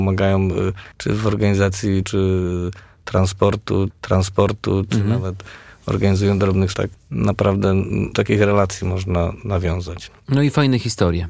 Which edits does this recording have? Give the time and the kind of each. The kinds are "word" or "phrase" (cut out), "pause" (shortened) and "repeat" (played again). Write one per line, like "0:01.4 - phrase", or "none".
0:00.9 - pause
0:02.0 - word
0:03.9 - repeat
0:06.7 - phrase
0:08.1 - phrase
0:10.2 - pause